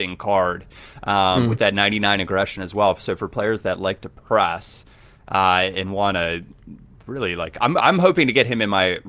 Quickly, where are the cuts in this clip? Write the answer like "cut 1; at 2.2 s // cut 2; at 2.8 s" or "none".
none